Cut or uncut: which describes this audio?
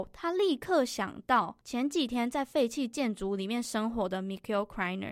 cut